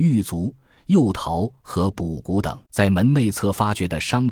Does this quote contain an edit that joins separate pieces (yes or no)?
yes